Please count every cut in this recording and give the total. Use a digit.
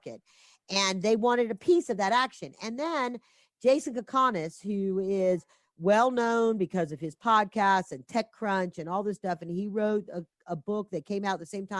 0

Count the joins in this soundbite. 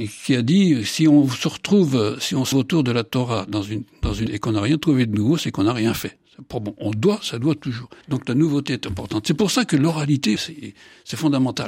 4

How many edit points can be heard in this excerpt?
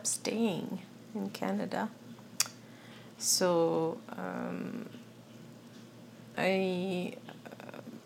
1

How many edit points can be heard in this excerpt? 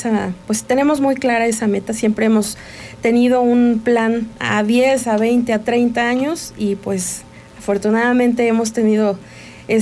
0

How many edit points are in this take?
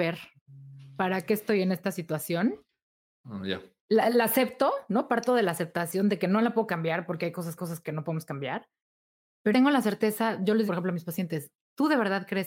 3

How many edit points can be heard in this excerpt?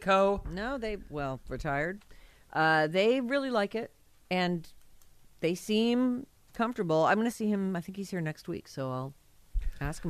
0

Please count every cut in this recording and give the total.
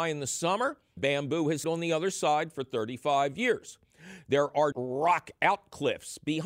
3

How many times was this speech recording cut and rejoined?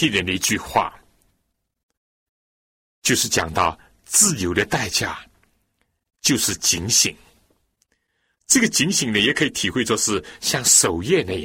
0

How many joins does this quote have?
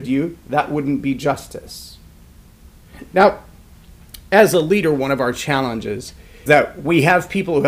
1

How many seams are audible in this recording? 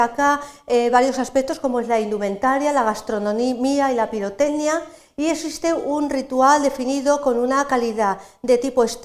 0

